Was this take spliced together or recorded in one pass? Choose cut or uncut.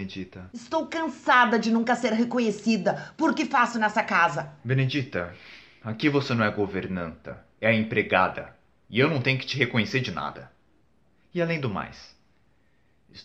cut